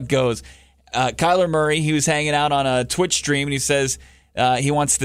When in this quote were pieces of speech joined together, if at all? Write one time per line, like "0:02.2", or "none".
none